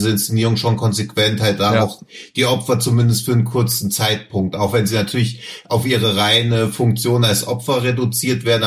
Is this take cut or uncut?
uncut